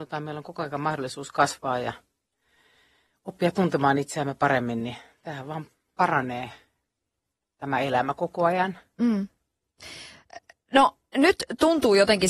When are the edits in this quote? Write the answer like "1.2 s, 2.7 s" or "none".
none